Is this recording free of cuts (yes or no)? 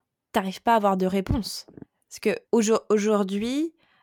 no